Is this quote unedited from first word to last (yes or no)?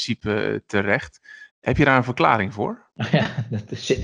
no